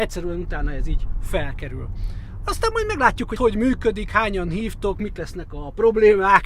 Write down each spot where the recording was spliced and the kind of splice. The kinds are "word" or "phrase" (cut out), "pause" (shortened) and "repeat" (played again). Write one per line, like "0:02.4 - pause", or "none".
0:03.4 - word